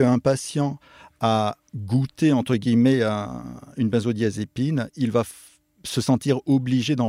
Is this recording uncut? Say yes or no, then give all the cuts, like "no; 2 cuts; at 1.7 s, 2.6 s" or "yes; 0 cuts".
yes; 0 cuts